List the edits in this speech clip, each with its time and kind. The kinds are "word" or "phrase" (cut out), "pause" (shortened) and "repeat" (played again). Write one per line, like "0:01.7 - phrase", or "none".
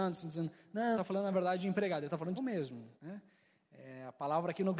0:00.9 - word
0:02.4 - phrase
0:02.9 - pause